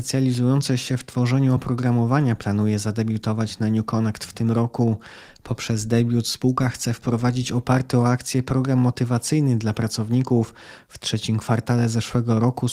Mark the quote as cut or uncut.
uncut